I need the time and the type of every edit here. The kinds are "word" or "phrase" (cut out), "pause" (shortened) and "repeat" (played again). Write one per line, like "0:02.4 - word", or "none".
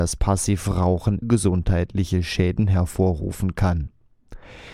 0:01.2 - word